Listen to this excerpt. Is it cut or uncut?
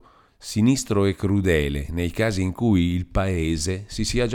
uncut